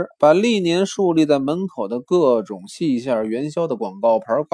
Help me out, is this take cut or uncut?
uncut